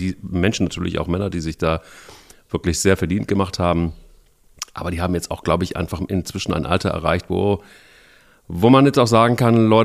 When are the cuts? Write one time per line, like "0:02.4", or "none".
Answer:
none